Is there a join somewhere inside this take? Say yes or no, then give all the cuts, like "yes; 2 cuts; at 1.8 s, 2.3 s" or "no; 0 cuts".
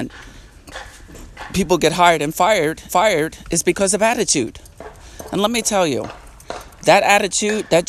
yes; 1 cut; at 2.9 s